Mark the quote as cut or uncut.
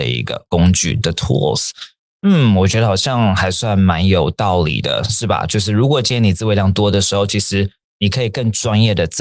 uncut